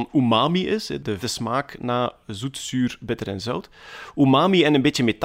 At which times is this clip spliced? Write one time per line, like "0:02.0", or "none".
0:01.2